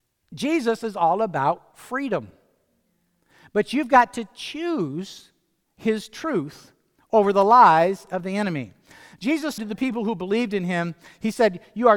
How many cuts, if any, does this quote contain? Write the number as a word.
one